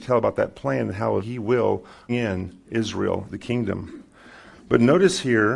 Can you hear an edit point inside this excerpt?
yes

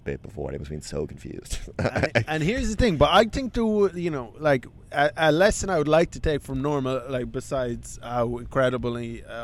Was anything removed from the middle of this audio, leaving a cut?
no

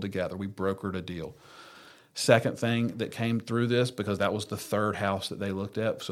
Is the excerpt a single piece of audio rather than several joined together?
yes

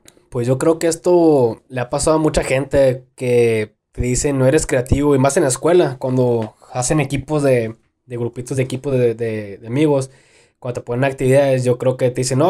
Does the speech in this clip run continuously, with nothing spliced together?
yes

